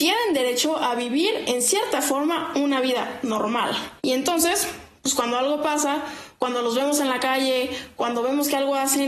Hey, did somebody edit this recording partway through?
yes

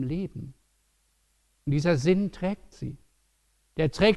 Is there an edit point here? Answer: no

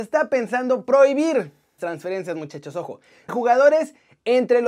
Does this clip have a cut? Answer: yes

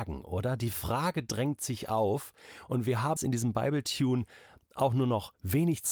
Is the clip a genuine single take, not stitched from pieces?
no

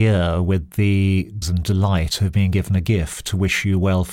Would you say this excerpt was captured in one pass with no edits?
no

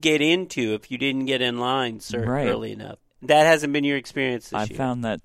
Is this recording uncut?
yes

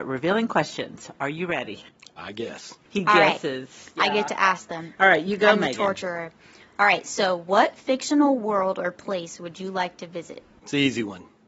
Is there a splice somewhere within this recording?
no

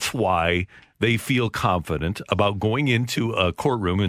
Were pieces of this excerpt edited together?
no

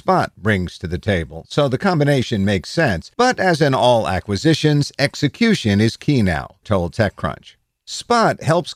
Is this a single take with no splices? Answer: no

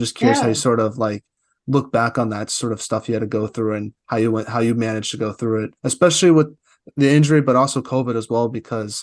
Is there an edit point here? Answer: yes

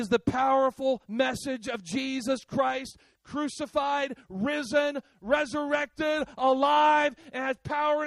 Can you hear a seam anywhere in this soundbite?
no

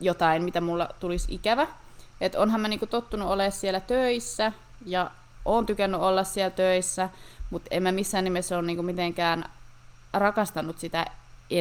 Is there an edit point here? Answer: no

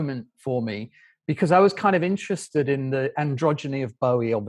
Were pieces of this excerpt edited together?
no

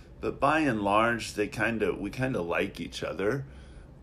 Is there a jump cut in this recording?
no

